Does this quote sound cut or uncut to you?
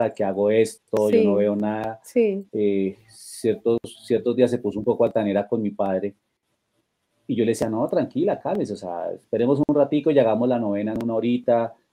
uncut